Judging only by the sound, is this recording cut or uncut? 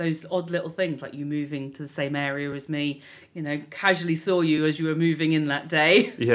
uncut